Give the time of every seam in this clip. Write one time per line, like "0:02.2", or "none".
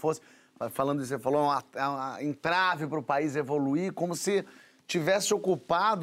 none